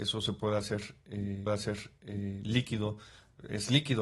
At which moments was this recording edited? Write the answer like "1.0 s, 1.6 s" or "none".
1.5 s